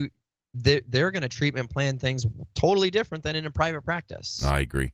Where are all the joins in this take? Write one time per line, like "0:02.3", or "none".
none